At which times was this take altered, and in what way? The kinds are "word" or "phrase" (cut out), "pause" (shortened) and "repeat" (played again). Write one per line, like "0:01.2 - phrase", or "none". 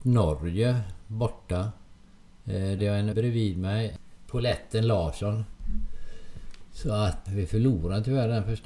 0:02.8 - word
0:03.1 - word
0:07.3 - word